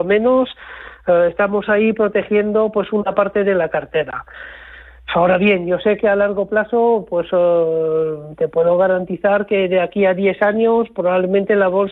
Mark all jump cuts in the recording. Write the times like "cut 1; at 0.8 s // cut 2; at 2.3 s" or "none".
none